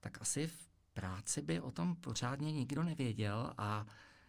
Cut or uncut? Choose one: uncut